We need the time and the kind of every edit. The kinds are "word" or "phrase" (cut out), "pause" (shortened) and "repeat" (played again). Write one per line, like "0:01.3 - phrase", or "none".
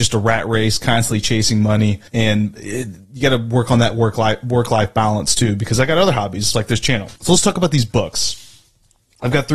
0:02.1 - pause
0:06.5 - word
0:07.2 - pause